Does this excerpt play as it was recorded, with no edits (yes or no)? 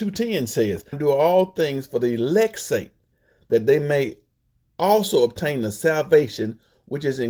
no